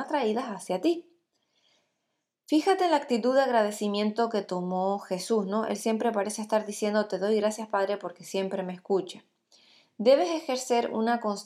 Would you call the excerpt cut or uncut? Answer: uncut